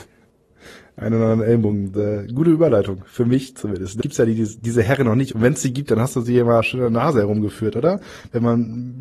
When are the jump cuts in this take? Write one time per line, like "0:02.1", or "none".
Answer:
0:04.0

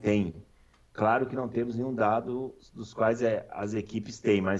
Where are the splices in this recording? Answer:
none

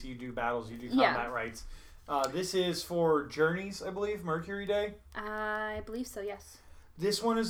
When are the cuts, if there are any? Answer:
none

